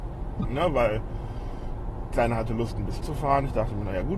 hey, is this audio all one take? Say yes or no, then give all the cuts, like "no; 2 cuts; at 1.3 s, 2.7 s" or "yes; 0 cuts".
no; 2 cuts; at 2.1 s, 3.0 s